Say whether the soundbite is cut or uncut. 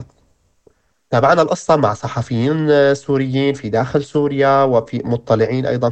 uncut